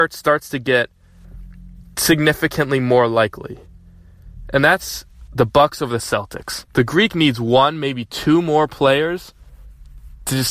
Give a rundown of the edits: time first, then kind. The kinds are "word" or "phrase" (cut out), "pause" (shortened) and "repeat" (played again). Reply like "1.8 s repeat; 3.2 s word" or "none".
6.7 s pause; 7.1 s word

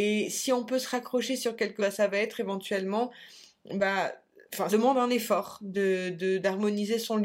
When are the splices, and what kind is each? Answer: 1.8 s word; 4.7 s phrase

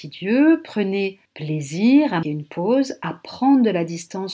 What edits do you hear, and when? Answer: 1.2 s pause; 2.2 s word

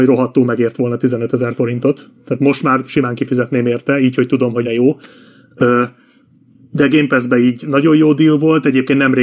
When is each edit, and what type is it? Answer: 4.6 s word

